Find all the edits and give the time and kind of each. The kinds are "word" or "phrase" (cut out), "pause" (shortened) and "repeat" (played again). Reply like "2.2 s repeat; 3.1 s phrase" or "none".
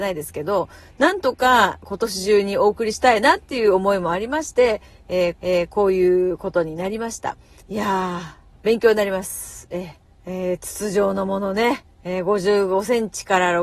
5.3 s repeat; 7.6 s pause; 10.1 s pause; 11.9 s pause

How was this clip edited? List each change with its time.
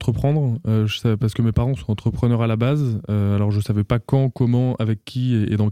1.8 s word

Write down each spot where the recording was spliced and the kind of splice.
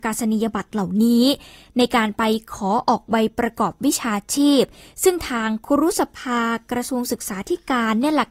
none

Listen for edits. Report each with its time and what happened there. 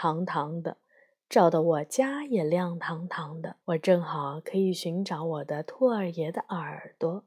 3.6 s pause

